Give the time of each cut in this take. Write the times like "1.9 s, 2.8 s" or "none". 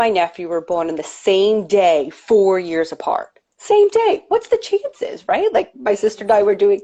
none